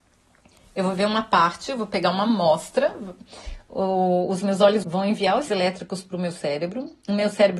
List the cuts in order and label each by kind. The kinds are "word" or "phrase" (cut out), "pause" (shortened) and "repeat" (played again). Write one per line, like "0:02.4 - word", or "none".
0:04.8 - word
0:05.5 - word